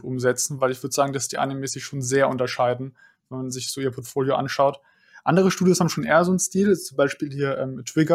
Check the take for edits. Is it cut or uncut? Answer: uncut